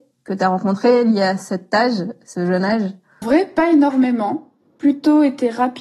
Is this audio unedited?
no; 1 cut; at 3.2 s

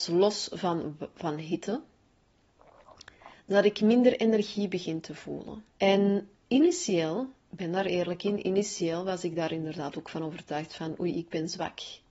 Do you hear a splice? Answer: yes; 2 cuts; at 5.7 s, 7.4 s

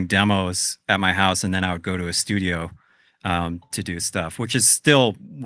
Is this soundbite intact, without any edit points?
yes; 0 cuts

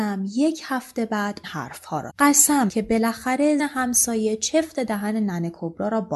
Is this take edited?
yes; 4 cuts; at 1.4 s, 2.1 s, 2.7 s, 3.6 s

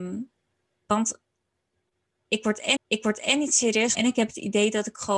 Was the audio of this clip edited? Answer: yes; 2 cuts; at 2.8 s, 3.9 s

